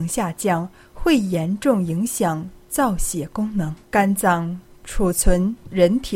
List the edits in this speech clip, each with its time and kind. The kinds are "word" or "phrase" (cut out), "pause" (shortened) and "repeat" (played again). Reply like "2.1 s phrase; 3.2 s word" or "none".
3.8 s pause